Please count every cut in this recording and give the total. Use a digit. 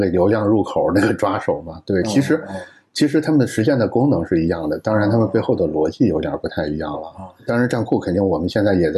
0